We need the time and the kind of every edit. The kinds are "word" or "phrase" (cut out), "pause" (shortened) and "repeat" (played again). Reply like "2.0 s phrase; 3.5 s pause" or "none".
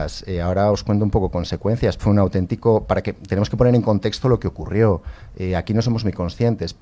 2.0 s phrase